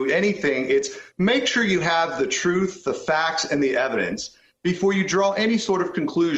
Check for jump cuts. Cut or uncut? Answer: uncut